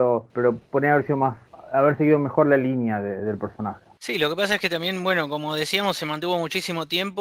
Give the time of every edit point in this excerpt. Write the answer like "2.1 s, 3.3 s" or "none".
none